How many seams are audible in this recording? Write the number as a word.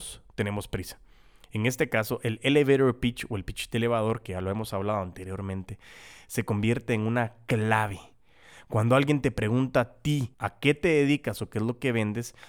one